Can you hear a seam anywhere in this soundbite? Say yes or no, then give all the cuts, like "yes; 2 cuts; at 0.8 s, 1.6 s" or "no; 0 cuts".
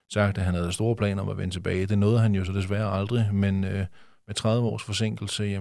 no; 0 cuts